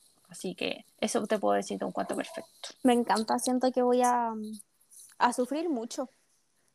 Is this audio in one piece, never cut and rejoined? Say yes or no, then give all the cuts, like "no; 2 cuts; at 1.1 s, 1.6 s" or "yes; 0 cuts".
no; 2 cuts; at 0.9 s, 2.8 s